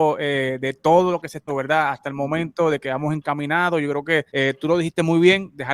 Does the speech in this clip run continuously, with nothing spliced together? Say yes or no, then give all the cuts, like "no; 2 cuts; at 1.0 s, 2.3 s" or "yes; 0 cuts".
no; 2 cuts; at 1.5 s, 4.3 s